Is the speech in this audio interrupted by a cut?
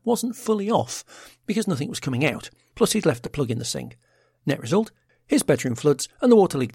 no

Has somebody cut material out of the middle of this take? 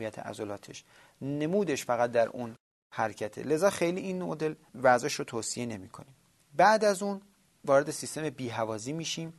no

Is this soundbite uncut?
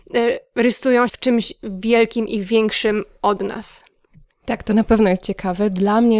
no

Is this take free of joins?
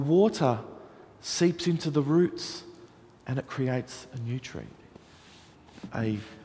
yes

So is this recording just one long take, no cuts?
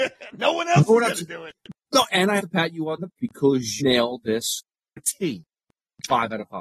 no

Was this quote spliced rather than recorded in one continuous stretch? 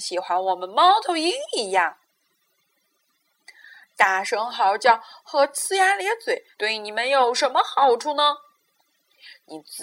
yes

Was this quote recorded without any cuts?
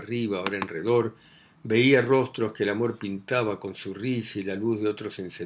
yes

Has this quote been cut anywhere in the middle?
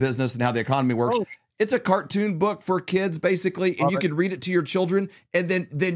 no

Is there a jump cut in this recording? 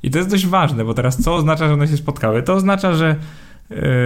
no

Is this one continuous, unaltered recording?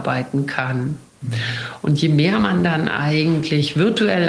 yes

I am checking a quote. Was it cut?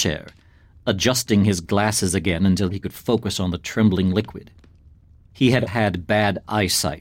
yes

